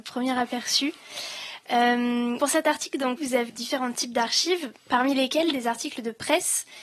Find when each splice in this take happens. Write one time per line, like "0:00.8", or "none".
0:02.4
0:03.2
0:03.5
0:04.8